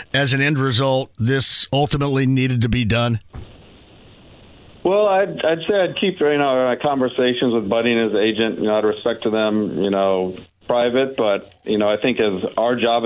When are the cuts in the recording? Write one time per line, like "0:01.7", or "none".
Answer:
none